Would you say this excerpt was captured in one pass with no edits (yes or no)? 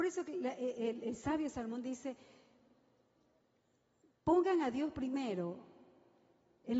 yes